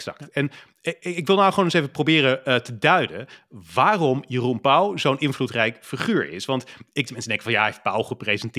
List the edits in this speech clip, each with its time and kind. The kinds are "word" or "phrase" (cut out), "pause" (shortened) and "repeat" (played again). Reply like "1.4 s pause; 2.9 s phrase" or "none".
7.1 s phrase